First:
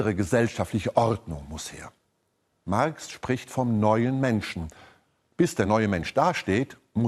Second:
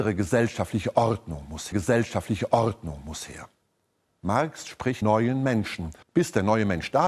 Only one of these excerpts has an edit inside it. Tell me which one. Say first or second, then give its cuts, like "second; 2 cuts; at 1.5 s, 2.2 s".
second; 3 cuts; at 1.7 s, 5.0 s, 6.0 s